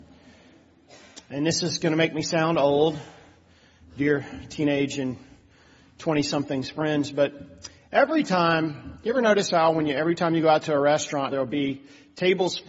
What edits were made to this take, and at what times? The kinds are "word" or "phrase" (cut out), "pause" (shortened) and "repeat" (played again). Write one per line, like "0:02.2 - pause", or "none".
0:11.3 - word